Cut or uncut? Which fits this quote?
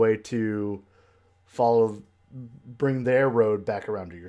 uncut